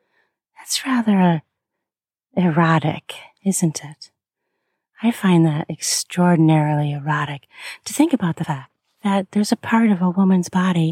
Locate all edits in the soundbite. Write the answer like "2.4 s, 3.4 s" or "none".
none